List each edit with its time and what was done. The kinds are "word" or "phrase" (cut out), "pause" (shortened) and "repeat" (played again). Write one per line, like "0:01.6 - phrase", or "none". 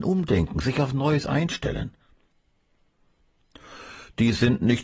none